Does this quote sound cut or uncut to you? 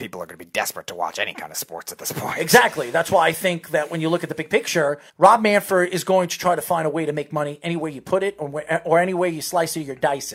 cut